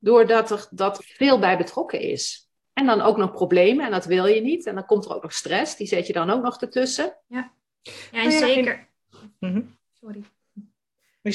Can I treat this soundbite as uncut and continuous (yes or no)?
no